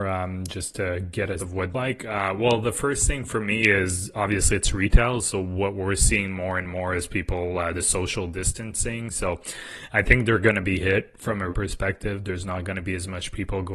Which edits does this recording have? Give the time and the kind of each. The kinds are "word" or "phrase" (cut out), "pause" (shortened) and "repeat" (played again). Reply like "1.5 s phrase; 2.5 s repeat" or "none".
1.4 s word; 1.7 s phrase; 11.5 s word